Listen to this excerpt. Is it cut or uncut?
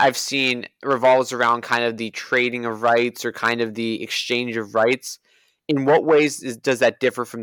uncut